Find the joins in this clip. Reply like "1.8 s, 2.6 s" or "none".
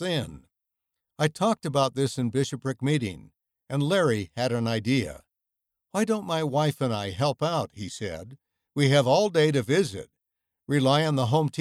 none